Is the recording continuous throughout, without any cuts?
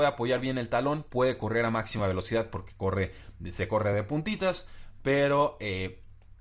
yes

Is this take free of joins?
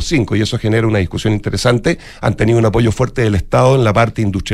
yes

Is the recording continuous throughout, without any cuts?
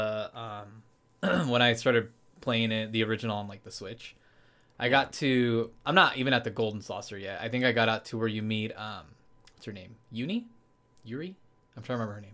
yes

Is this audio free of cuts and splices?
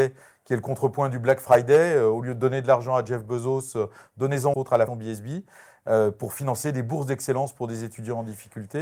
no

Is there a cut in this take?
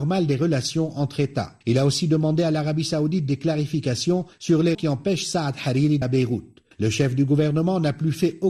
yes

